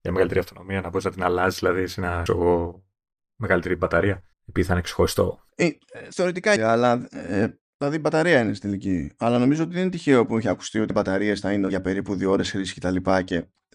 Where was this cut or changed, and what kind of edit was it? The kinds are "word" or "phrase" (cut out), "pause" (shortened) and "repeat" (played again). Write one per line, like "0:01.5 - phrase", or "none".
0:02.3 - word
0:04.3 - pause
0:05.5 - pause
0:06.6 - word
0:07.7 - pause
0:10.9 - word
0:11.7 - word